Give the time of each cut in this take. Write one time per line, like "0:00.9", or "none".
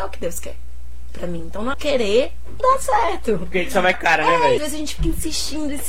0:01.7
0:02.6
0:03.9
0:04.6